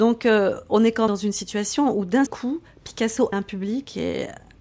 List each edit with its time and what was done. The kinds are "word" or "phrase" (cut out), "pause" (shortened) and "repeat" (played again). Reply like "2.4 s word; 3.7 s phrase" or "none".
1.1 s word; 2.3 s word; 3.3 s word

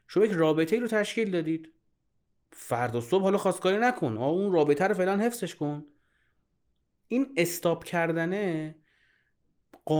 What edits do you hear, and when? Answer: none

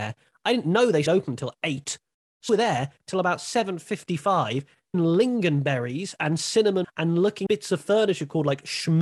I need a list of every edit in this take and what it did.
1.1 s word; 2.5 s word; 4.9 s word; 6.8 s word; 7.5 s word

